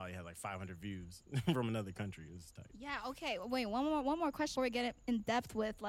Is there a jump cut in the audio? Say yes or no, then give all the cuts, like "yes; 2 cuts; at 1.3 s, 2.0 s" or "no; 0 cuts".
yes; 1 cut; at 4.6 s